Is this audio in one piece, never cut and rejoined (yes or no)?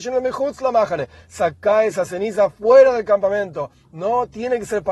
yes